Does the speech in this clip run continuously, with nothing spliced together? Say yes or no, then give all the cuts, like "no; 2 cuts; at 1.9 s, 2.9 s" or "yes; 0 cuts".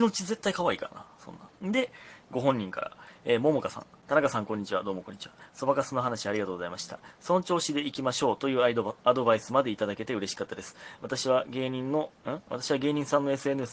no; 2 cuts; at 1.5 s, 12.2 s